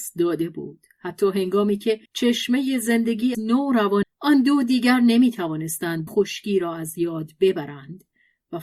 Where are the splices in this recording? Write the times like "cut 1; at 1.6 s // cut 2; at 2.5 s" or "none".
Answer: cut 1; at 2.1 s // cut 2; at 3.3 s // cut 3; at 4.0 s // cut 4; at 6.1 s